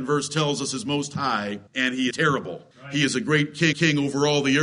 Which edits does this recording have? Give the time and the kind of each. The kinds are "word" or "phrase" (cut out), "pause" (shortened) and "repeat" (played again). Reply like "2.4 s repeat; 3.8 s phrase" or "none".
1.7 s pause; 2.1 s word; 2.7 s pause; 3.7 s repeat